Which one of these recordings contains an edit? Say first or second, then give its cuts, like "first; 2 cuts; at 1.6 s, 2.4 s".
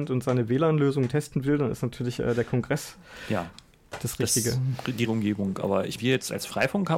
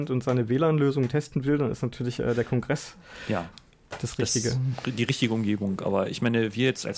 first; 2 cuts; at 5.1 s, 6.0 s